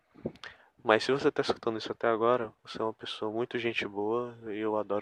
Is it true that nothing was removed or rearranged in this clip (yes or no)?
no